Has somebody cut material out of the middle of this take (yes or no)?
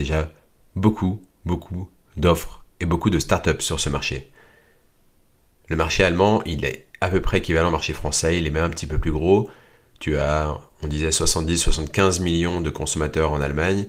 no